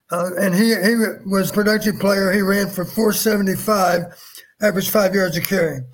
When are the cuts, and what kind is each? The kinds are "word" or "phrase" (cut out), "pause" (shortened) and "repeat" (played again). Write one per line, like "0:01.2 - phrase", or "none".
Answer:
0:01.5 - word